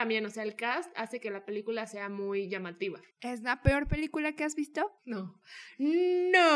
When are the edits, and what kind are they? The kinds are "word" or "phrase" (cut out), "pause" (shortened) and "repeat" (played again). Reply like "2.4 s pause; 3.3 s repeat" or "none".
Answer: 3.1 s pause; 5.0 s pause